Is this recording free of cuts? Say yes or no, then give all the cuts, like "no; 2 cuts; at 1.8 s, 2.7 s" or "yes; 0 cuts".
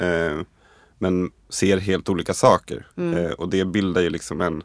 no; 1 cut; at 2.9 s